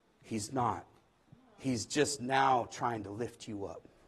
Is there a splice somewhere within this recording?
yes; 1 cut; at 1.3 s

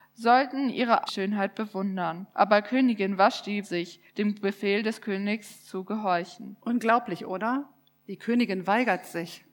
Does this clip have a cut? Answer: yes; 5 cuts; at 1.1 s, 2.3 s, 3.6 s, 4.1 s, 6.6 s

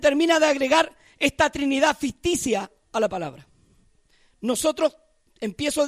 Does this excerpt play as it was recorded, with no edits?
yes; 0 cuts

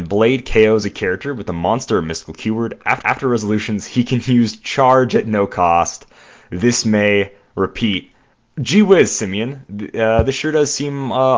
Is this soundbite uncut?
no; 1 cut; at 3.0 s

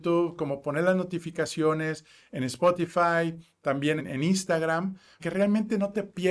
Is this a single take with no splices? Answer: no; 2 cuts; at 4.0 s, 5.2 s

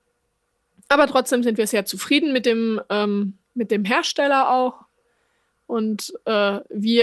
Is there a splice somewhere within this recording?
yes; 1 cut; at 3.4 s

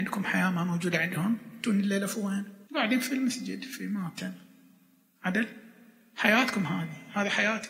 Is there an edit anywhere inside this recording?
yes; 1 cut; at 2.7 s

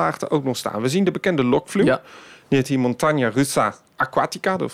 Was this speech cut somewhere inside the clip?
no; 0 cuts

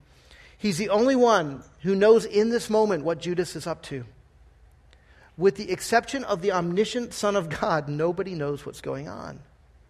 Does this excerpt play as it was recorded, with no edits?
yes; 0 cuts

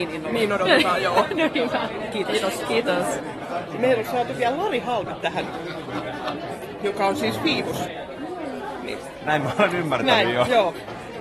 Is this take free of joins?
yes; 0 cuts

